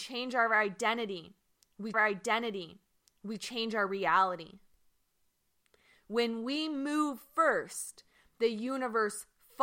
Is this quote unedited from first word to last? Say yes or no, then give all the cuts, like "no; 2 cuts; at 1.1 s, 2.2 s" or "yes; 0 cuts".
no; 1 cut; at 1.9 s